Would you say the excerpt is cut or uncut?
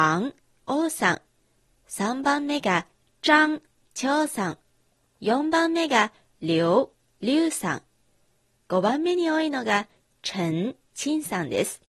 uncut